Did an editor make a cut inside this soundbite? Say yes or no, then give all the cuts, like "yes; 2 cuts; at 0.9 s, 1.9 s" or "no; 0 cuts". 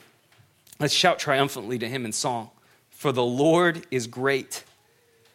yes; 1 cut; at 2.7 s